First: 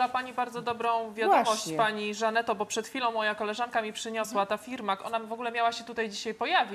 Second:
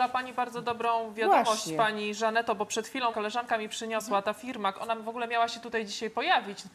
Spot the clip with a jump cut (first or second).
second